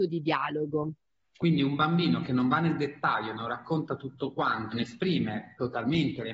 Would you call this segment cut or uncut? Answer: cut